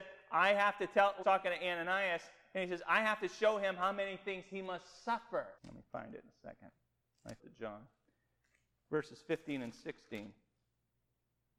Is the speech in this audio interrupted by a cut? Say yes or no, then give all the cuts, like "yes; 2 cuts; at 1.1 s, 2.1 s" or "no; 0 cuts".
yes; 3 cuts; at 1.2 s, 5.6 s, 7.4 s